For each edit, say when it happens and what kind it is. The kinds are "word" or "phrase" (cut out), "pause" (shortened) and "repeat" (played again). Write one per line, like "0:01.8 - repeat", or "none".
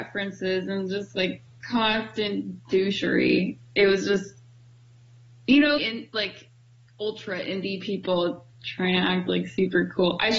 0:05.8 - word
0:08.5 - pause